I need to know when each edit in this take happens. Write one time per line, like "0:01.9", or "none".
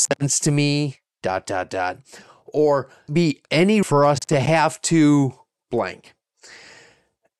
0:01.1
0:03.1
0:03.8